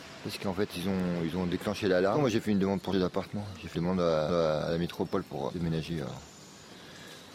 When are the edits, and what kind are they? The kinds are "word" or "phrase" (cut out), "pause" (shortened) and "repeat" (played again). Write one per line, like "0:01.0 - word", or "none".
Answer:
0:02.9 - word
0:03.7 - word
0:04.3 - repeat
0:05.5 - word